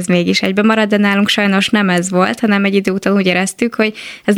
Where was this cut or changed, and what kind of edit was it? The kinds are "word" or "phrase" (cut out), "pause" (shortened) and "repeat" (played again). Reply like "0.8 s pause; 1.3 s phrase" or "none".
none